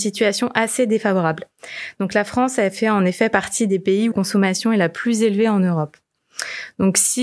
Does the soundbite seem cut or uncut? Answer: cut